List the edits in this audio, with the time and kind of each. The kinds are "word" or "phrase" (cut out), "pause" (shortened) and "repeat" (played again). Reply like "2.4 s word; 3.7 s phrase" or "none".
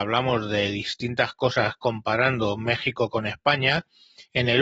none